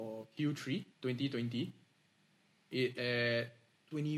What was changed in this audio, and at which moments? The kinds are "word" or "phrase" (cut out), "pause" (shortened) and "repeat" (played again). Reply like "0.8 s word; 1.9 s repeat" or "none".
0.9 s pause; 2.9 s word